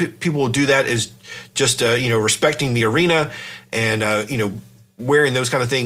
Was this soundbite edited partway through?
no; 0 cuts

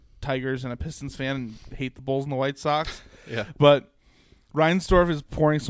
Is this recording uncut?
yes; 0 cuts

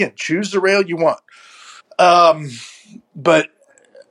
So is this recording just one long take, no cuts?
no; 1 cut; at 1.8 s

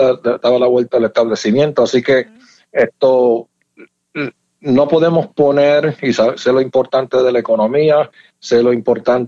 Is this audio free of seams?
yes; 0 cuts

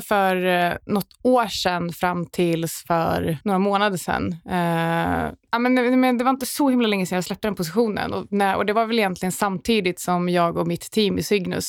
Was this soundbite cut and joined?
no; 0 cuts

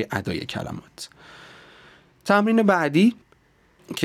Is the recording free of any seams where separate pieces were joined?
yes; 0 cuts

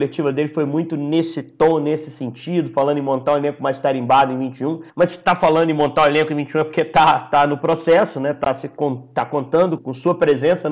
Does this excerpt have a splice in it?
yes; 2 cuts; at 4.9 s, 9.8 s

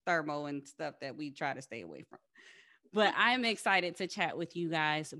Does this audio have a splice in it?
no; 0 cuts

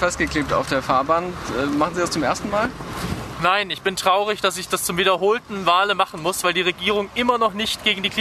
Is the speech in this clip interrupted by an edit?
no; 0 cuts

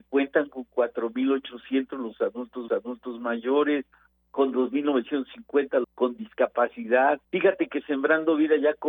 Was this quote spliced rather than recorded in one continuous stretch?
yes; 3 cuts; at 2.7 s, 5.8 s, 7.2 s

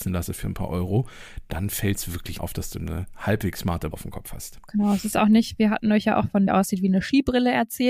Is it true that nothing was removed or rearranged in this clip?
no; 3 cuts; at 2.4 s, 3.9 s, 6.5 s

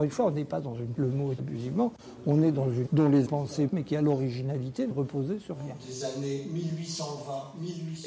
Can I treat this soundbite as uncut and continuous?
no; 6 cuts; at 1.0 s, 1.4 s, 2.9 s, 3.3 s, 3.7 s, 4.9 s

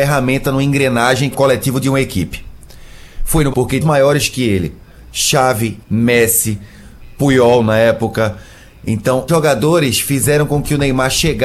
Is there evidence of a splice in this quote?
yes; 5 cuts; at 1.3 s, 3.5 s, 3.8 s, 5.8 s, 9.3 s

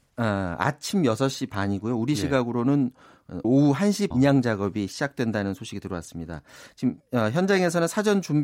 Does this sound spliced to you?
yes; 2 cuts; at 3.4 s, 4.1 s

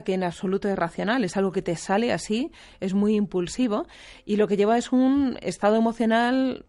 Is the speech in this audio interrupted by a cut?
no; 0 cuts

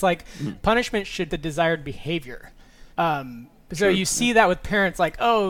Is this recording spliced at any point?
yes; 2 cuts; at 1.3 s, 2.9 s

